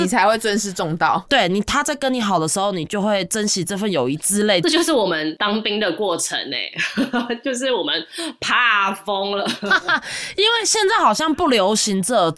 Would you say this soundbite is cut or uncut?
uncut